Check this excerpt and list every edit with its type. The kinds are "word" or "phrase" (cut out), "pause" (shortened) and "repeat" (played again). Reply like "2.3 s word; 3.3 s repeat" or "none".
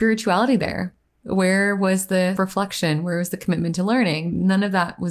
2.4 s word